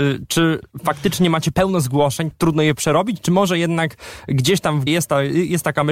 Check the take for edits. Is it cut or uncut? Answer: cut